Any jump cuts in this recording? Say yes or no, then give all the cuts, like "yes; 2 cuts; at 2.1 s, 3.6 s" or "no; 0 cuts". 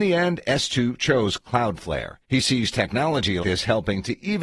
yes; 2 cuts; at 2.2 s, 3.4 s